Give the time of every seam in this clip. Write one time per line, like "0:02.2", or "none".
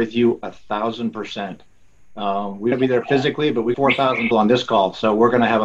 0:02.7
0:03.7
0:04.3